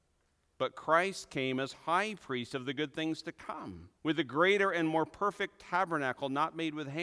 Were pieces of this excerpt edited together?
yes; 1 cut; at 4.0 s

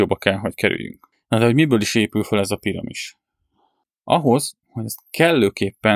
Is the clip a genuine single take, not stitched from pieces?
no; 1 cut; at 4.6 s

